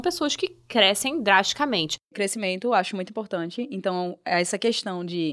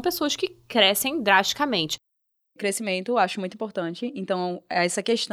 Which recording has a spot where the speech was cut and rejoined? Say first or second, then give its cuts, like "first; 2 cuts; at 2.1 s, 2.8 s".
first; 1 cut; at 2.0 s